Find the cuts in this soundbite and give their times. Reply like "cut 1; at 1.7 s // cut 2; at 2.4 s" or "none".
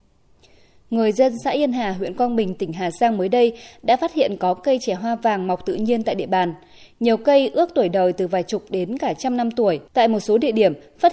cut 1; at 9.9 s